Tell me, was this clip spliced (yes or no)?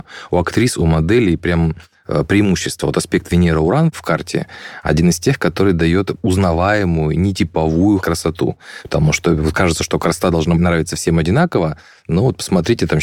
no